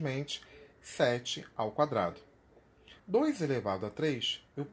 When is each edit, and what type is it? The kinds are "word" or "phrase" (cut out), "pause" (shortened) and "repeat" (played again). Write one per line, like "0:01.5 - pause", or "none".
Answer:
0:03.0 - pause